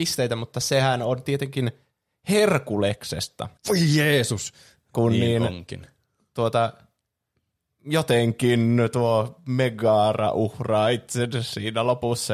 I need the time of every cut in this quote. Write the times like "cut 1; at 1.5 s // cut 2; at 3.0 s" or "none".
cut 1; at 3.6 s